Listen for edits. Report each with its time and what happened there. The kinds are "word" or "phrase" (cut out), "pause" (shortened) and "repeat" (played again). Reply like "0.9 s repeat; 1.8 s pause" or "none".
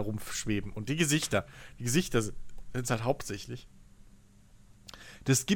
none